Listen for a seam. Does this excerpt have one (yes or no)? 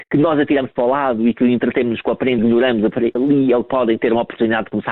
yes